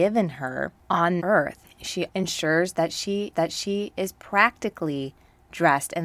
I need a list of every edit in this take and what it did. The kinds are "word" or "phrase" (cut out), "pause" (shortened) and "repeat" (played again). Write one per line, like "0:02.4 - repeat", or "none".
0:01.2 - word
0:02.1 - word
0:03.3 - repeat